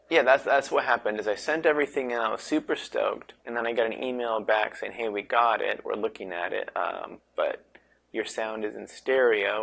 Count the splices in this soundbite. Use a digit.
1